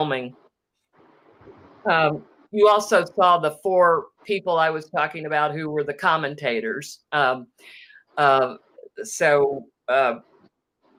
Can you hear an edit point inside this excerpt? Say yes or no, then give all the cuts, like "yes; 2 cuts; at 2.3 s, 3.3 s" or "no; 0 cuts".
no; 0 cuts